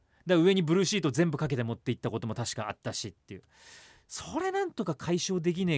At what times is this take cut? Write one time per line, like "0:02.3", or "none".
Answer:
none